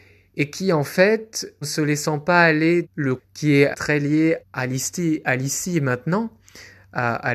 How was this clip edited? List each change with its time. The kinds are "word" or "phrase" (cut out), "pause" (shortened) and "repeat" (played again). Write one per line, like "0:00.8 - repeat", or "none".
0:01.6 - word
0:02.8 - word
0:03.2 - word
0:03.7 - word
0:04.4 - word

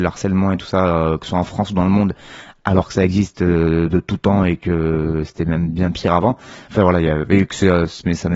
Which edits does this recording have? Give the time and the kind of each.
none

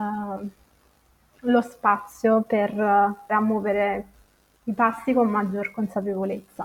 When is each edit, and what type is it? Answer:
0:03.3 - word

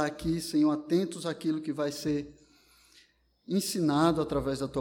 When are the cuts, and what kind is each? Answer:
none

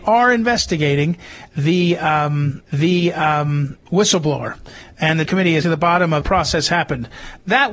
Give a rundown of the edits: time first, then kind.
0:02.7 - repeat
0:05.2 - word
0:05.6 - phrase
0:06.2 - phrase

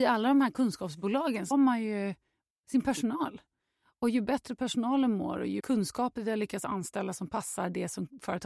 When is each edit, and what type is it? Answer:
0:01.5 - word
0:05.6 - word

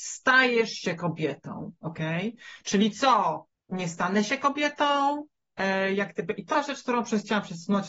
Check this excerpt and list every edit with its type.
0:03.5 - pause
0:06.5 - word

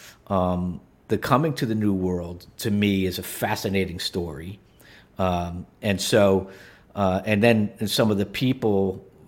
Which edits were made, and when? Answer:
none

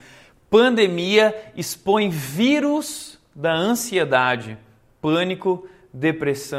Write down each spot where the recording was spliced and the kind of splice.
none

